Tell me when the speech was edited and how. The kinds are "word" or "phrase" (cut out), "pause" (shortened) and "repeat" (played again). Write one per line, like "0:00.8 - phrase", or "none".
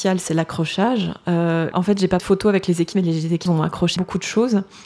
0:01.7 - word
0:02.2 - word
0:02.9 - word
0:03.5 - word
0:04.0 - word